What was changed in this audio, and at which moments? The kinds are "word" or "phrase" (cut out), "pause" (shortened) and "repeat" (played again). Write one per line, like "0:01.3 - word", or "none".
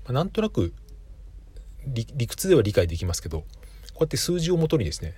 none